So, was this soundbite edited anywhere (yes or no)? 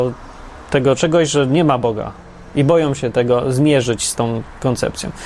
no